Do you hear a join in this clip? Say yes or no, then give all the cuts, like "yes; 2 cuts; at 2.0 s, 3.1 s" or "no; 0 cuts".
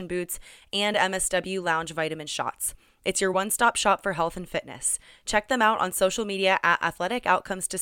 no; 0 cuts